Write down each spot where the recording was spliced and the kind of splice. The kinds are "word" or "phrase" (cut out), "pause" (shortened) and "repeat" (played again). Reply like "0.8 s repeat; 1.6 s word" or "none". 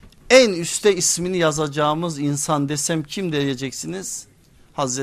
none

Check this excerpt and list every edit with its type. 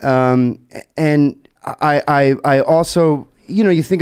1.6 s pause

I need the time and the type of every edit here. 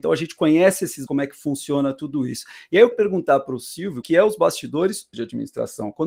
1.1 s word; 2.9 s word; 4.0 s word; 5.1 s phrase

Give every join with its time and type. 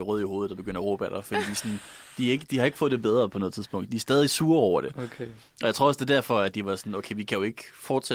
none

